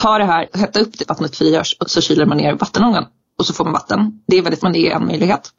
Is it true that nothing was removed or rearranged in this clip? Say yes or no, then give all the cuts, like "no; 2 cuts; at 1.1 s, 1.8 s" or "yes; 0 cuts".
no; 3 cuts; at 1.0 s, 1.8 s, 4.6 s